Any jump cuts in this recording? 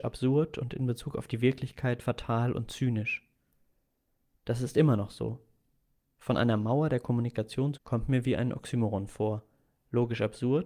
yes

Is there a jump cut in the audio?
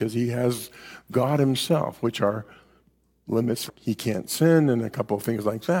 yes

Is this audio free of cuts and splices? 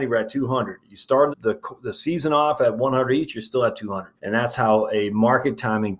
no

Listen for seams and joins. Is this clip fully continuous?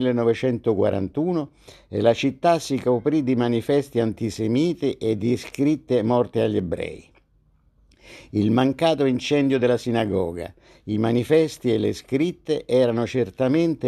yes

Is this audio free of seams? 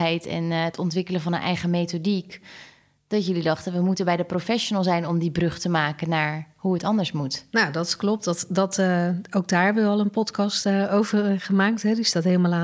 yes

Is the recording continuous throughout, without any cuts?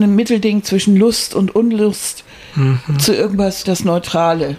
no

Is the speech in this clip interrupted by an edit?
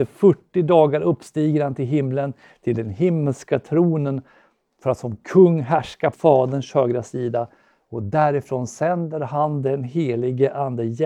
yes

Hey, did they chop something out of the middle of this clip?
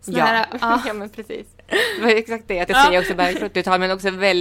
yes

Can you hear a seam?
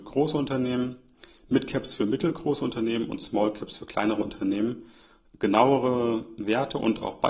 no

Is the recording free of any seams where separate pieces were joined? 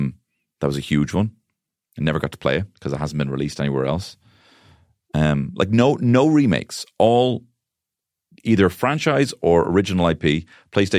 yes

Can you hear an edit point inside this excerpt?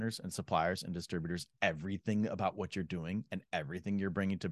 no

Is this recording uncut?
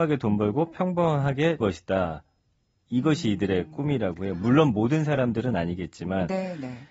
no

